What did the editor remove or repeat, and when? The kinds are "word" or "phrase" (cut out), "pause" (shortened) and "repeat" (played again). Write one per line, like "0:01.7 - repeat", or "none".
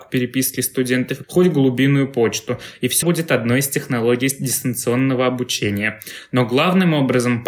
0:01.2 - word
0:03.0 - phrase